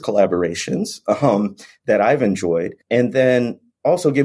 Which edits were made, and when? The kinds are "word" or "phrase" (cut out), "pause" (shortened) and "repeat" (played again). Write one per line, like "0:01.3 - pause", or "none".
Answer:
0:02.8 - pause